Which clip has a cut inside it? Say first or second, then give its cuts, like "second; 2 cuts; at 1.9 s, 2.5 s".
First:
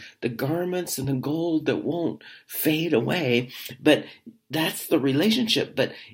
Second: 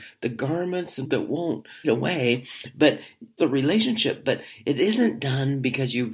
second; 3 cuts; at 1.0 s, 1.8 s, 3.4 s